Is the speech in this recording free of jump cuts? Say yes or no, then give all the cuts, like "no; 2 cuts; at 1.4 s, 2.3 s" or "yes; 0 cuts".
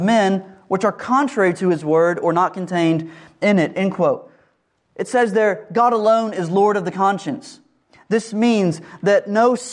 yes; 0 cuts